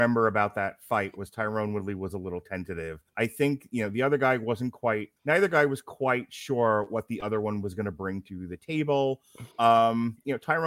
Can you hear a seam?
yes; 3 cuts; at 3.1 s, 5.2 s, 9.5 s

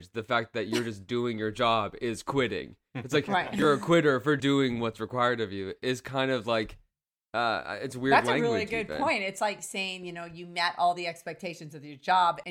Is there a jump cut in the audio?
yes; 1 cut; at 4.4 s

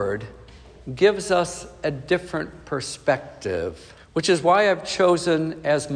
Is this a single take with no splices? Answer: no; 1 cut; at 4.0 s

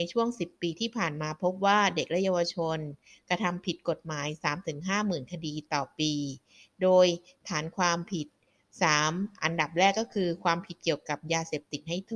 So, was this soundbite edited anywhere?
no; 0 cuts

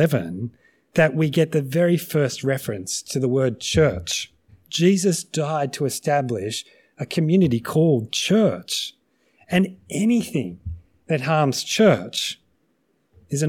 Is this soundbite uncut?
no; 1 cut; at 4.5 s

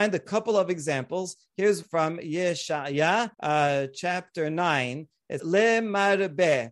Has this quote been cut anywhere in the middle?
yes; 3 cuts; at 1.8 s, 3.3 s, 5.4 s

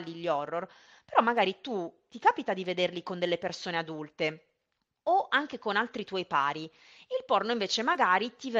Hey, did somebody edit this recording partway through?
no; 0 cuts

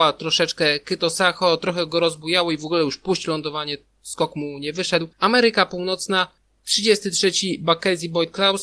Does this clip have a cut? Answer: no; 0 cuts

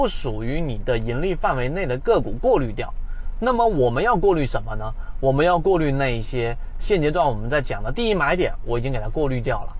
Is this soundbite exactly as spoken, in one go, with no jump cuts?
no; 1 cut; at 6.8 s

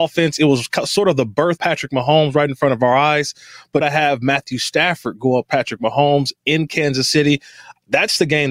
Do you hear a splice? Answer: yes; 3 cuts; at 1.6 s, 3.8 s, 5.5 s

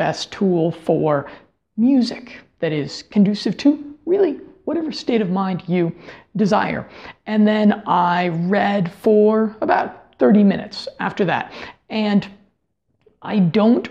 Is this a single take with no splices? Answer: yes; 0 cuts

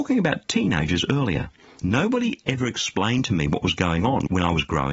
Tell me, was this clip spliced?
no; 0 cuts

